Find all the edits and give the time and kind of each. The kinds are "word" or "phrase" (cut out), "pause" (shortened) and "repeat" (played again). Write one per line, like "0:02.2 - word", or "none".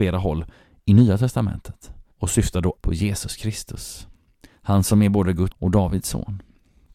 0:02.1 - pause
0:02.8 - word
0:05.5 - word